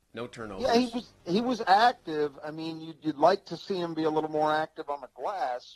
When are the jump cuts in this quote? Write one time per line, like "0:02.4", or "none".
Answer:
0:01.2